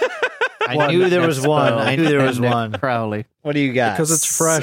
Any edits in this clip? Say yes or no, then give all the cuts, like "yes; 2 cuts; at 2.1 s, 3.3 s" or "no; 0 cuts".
yes; 1 cut; at 2.0 s